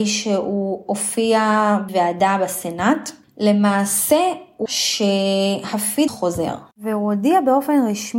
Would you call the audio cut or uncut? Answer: cut